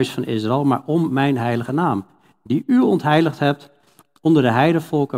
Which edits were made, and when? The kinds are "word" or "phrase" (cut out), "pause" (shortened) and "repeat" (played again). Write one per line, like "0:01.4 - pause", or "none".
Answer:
none

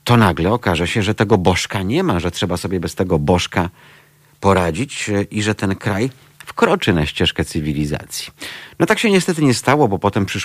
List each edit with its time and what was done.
none

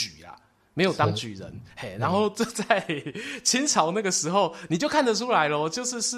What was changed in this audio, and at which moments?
0:01.7 - pause

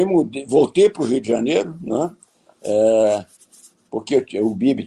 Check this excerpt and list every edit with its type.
none

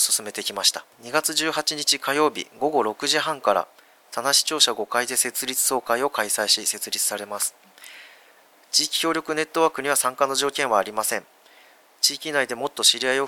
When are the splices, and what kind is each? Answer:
0:00.9 - pause

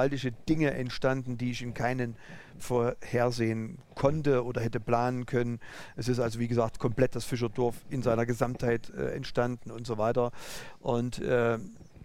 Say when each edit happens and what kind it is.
0:02.6 - word

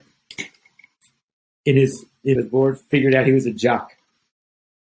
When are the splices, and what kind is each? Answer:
0:02.4 - phrase

